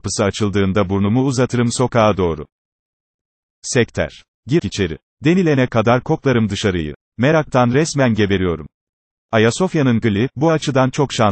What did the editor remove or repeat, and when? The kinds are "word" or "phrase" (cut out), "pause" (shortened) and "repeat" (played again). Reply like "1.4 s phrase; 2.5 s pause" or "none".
4.6 s word; 10.0 s word